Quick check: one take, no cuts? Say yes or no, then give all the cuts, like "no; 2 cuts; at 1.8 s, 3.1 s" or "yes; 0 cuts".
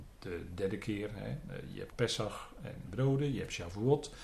no; 2 cuts; at 1.9 s, 2.9 s